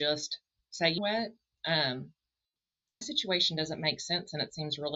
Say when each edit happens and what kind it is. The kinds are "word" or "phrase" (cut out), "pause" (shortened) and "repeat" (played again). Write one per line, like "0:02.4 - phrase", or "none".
0:01.0 - word
0:03.0 - word